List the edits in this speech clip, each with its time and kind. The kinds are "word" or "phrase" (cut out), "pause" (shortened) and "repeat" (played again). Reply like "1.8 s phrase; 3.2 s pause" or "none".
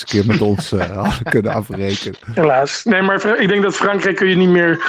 none